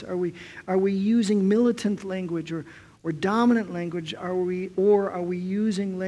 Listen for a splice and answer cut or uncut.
uncut